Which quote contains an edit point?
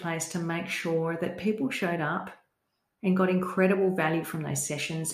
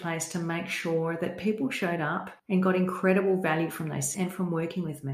second; 2 cuts; at 2.4 s, 4.1 s

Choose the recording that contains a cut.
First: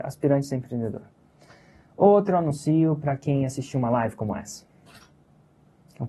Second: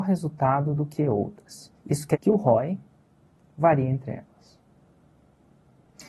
second; 2 cuts; at 1.8 s, 2.1 s

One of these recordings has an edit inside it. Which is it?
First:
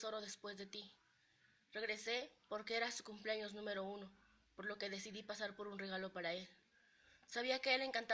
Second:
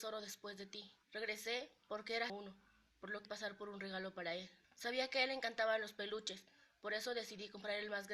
second; 4 cuts; at 1.0 s, 2.3 s, 3.2 s, 4.6 s

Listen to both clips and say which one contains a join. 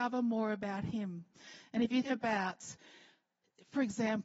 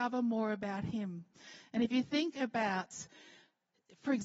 first; 1 cut; at 2.0 s

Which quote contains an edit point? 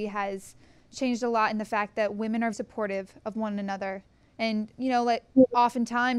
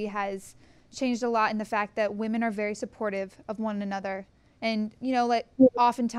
first; 1 cut; at 2.5 s

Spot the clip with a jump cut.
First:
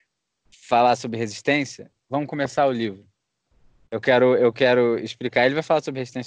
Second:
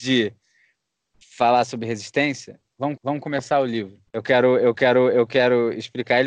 second; 3 cuts; at 3.0 s, 4.1 s, 4.7 s

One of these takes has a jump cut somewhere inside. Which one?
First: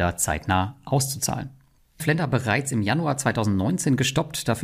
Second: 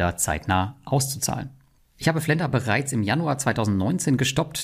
first; 1 cut; at 2.0 s

